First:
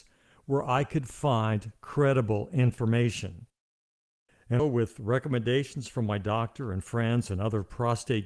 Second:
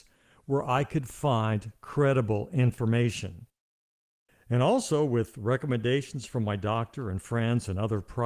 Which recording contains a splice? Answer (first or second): first